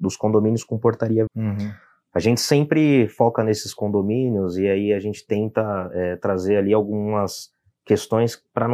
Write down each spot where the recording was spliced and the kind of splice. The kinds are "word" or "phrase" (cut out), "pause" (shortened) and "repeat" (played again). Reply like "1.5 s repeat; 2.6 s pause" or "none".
1.3 s word